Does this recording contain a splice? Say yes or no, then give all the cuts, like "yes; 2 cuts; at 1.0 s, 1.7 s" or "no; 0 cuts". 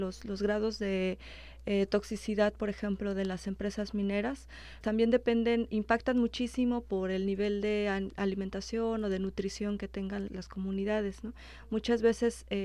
yes; 3 cuts; at 4.8 s, 5.7 s, 10.3 s